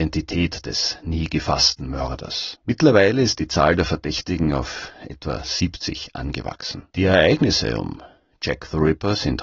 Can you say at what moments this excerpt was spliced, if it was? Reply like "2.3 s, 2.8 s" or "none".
2.6 s, 6.9 s